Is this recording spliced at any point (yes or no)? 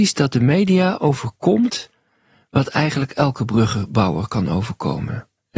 no